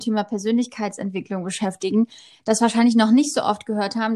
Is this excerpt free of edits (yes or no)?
yes